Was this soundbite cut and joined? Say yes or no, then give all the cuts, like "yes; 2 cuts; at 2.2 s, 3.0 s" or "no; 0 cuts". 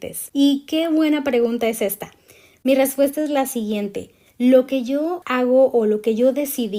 no; 0 cuts